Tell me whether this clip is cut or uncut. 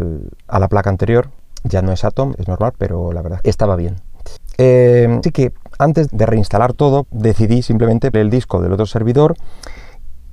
cut